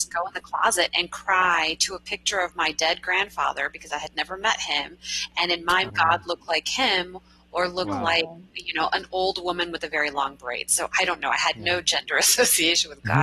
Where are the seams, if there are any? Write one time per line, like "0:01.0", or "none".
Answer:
0:05.9